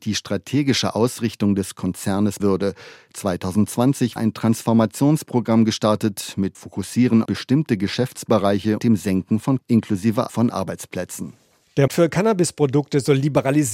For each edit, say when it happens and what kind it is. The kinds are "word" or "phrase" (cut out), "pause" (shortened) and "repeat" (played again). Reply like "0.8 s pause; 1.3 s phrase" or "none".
2.4 s word; 4.2 s word; 6.5 s word; 7.2 s word; 8.8 s word; 9.6 s word; 10.3 s word; 11.9 s word